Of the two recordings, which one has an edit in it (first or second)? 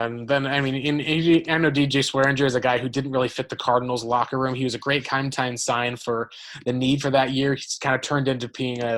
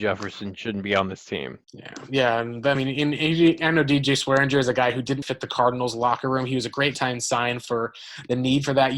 second